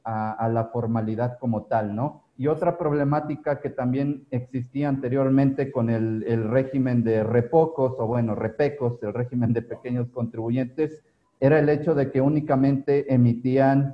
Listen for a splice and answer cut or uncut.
cut